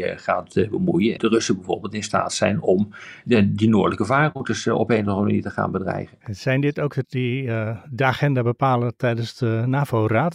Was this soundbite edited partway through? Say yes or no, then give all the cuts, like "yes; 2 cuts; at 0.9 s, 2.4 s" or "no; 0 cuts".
yes; 3 cuts; at 1.2 s, 6.2 s, 7.0 s